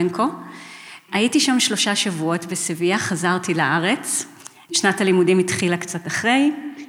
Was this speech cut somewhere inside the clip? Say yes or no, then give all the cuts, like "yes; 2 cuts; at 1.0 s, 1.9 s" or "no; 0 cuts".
no; 0 cuts